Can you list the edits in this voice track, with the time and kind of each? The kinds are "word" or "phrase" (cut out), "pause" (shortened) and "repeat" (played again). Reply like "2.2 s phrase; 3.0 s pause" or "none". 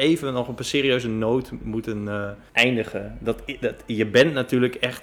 1.6 s word; 2.5 s pause